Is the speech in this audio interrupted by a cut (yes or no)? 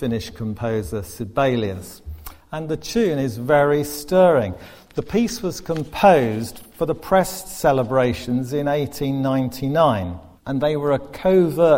yes